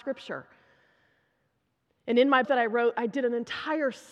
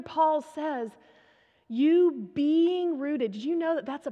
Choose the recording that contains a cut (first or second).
first